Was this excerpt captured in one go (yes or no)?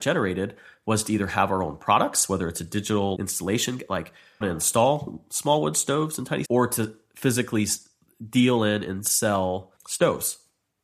no